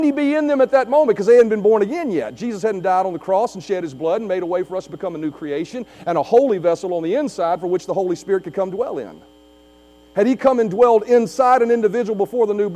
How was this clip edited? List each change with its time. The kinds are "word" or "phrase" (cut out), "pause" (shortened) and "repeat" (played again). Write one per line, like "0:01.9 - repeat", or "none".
none